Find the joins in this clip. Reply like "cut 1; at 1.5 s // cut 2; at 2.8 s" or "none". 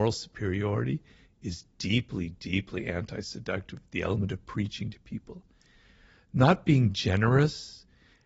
none